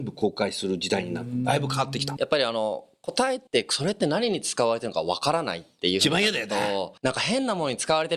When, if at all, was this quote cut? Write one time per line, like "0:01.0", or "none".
0:02.2
0:03.5
0:07.0